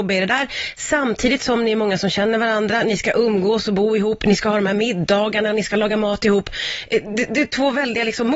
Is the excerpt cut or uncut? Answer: uncut